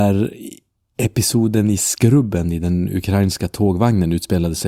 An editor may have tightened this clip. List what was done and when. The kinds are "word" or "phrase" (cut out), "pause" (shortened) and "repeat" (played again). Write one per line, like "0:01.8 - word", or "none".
none